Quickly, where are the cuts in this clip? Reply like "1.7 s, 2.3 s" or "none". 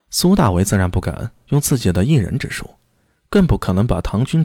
none